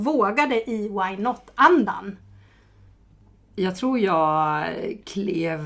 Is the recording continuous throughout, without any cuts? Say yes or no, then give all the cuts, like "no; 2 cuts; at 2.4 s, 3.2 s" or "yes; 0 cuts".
yes; 0 cuts